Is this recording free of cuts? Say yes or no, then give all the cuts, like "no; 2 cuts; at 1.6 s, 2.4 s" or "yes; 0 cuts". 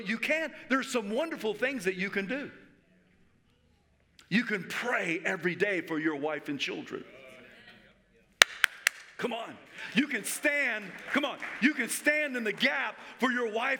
yes; 0 cuts